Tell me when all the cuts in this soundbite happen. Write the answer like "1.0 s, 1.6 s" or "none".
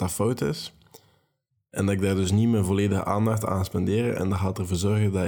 none